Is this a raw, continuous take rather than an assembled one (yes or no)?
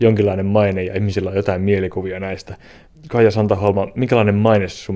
yes